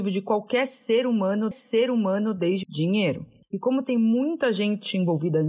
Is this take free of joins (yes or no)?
no